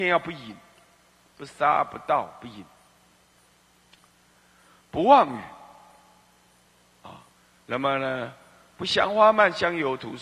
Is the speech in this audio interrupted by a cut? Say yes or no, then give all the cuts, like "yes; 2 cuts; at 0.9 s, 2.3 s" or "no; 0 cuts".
no; 0 cuts